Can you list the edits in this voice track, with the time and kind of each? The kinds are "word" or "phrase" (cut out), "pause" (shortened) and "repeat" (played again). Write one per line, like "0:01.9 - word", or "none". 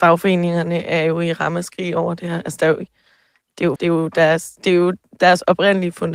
0:03.8 - word